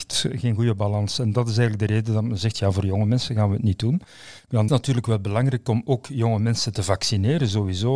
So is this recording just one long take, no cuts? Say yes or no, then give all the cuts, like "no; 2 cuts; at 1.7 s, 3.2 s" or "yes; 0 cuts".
no; 1 cut; at 4.7 s